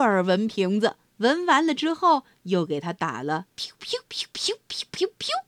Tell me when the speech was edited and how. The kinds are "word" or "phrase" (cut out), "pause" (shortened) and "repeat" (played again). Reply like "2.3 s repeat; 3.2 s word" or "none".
1.1 s pause; 3.5 s pause

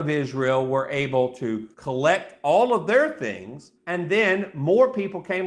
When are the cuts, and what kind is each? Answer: 1.7 s pause; 3.8 s pause

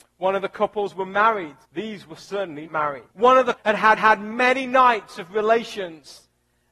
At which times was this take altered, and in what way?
1.6 s pause; 2.7 s word; 3.1 s pause; 3.6 s word; 4.0 s repeat

